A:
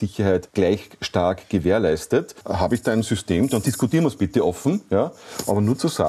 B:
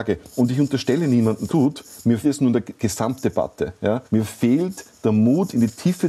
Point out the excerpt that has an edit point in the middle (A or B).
B